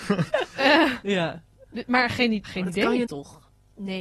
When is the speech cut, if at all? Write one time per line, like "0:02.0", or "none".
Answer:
0:02.4
0:03.1